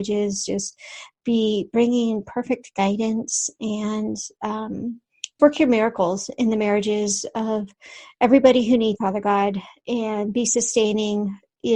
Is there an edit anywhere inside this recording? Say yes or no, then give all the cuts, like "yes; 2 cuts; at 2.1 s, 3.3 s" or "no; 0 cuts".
yes; 2 cuts; at 5.4 s, 9.0 s